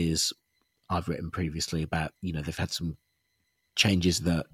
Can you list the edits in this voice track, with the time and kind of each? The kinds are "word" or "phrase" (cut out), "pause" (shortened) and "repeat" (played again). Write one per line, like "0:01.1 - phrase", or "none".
0:02.2 - pause